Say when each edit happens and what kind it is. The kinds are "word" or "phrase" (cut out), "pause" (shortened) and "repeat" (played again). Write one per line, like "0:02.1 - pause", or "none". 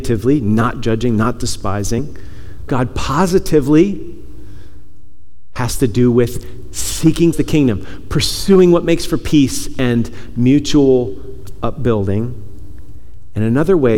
0:02.7 - phrase
0:07.3 - word